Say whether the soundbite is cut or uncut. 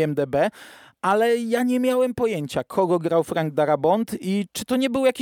uncut